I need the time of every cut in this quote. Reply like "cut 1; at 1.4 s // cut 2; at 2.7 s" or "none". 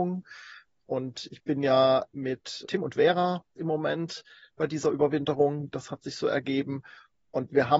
cut 1; at 2.7 s // cut 2; at 3.6 s

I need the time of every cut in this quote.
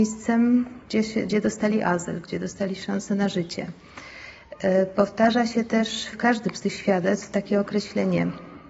cut 1; at 6.1 s

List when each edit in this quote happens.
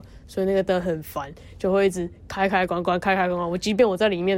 none

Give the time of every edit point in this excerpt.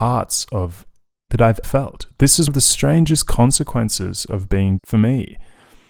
cut 1; at 1.3 s // cut 2; at 1.6 s // cut 3; at 2.5 s // cut 4; at 4.8 s

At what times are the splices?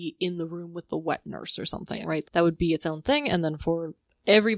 cut 1; at 2.2 s

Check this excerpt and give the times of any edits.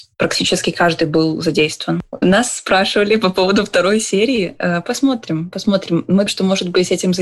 cut 1; at 6.3 s

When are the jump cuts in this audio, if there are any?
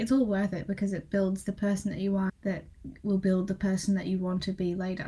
cut 1; at 2.3 s

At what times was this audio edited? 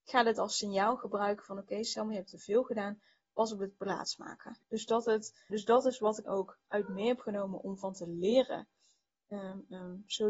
cut 1; at 4.6 s // cut 2; at 5.5 s // cut 3; at 6.2 s

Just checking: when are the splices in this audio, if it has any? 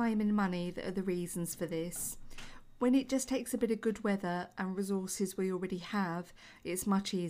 none

